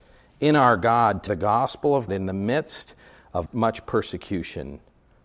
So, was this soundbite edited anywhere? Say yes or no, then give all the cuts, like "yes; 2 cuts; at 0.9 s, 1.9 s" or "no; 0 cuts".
yes; 3 cuts; at 1.3 s, 2.1 s, 3.5 s